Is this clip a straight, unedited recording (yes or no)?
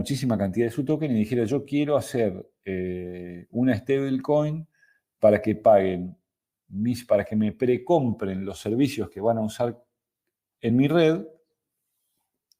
yes